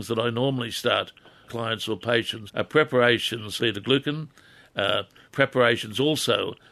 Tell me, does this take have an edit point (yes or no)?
yes